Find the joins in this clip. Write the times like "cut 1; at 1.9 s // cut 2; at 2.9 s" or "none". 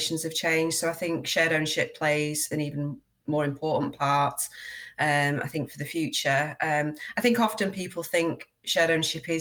none